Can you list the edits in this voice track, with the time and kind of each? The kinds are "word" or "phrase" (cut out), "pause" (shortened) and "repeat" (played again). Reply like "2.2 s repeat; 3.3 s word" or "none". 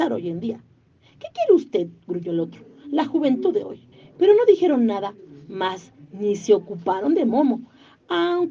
3.9 s pause